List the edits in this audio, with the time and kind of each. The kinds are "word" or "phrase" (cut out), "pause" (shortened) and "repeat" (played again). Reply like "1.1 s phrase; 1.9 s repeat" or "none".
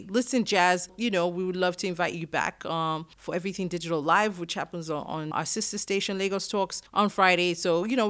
3.1 s pause; 5.3 s word; 6.9 s pause